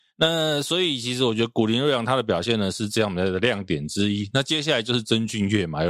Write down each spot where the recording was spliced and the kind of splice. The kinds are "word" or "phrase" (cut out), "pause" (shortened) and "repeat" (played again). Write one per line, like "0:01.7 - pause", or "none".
none

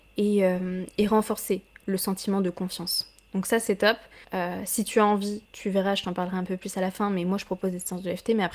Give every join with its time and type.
none

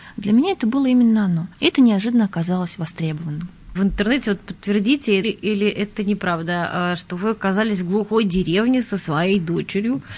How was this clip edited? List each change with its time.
0:01.5 - pause
0:03.7 - phrase
0:05.2 - word

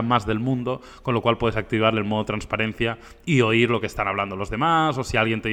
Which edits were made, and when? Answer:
none

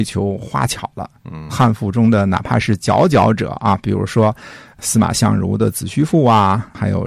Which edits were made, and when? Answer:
0:01.5 - word

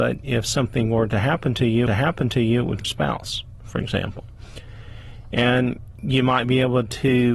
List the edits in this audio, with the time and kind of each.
0:01.9 - repeat
0:02.8 - phrase

